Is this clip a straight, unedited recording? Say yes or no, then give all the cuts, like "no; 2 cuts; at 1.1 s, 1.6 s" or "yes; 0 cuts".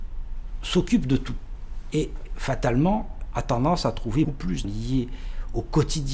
no; 3 cuts; at 3.3 s, 4.2 s, 4.6 s